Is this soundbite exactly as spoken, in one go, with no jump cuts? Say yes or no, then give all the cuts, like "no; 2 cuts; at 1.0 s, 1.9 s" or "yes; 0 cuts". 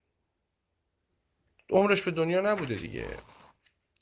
yes; 0 cuts